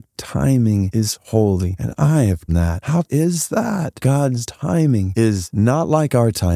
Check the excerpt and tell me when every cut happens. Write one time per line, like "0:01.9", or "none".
0:02.5
0:03.1